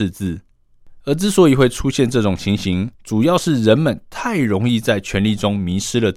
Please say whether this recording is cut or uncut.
cut